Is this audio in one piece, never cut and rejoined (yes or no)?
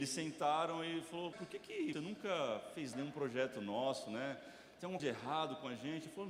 no